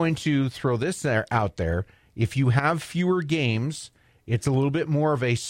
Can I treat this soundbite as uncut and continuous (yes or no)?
yes